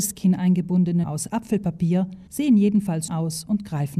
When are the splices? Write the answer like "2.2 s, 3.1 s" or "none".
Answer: 1.0 s, 2.3 s, 3.1 s